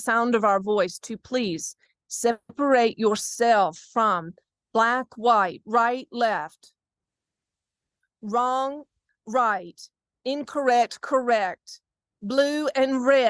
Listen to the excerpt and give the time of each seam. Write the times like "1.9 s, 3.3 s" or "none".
none